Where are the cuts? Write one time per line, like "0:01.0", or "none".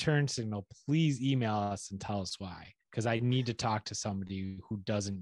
0:02.8

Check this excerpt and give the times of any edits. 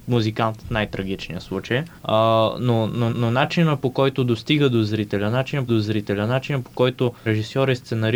0:02.0
0:03.1
0:05.7
0:07.3

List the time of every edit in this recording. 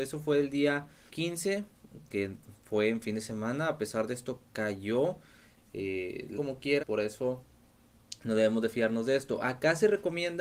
0:01.1
0:06.3
0:06.8

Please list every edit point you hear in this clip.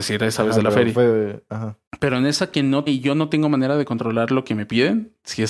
0:01.9
0:02.9

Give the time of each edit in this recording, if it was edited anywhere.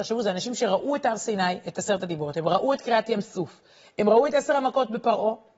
none

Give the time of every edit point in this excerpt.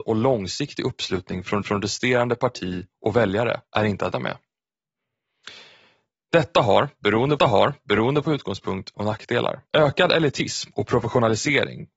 0:01.6
0:03.7
0:04.1
0:07.4
0:08.9
0:09.7

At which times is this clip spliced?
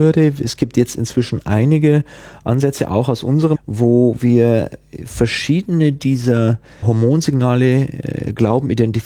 0:03.6
0:06.8

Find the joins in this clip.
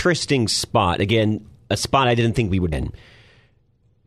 0:02.7

